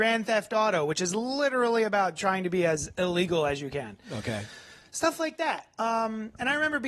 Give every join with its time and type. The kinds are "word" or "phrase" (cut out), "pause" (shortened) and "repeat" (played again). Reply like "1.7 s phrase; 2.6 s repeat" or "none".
none